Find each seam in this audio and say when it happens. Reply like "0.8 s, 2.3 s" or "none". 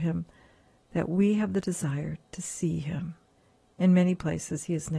3.4 s